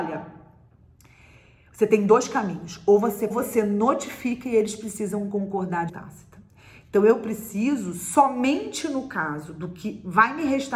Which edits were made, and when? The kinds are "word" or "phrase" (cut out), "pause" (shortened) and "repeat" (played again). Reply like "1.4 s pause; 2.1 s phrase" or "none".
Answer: 3.3 s phrase; 5.9 s phrase